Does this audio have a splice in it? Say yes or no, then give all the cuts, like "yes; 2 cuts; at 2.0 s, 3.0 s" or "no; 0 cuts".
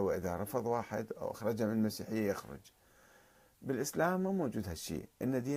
no; 0 cuts